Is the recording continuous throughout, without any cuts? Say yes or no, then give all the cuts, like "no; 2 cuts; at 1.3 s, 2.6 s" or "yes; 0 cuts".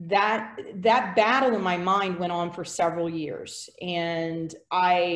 yes; 0 cuts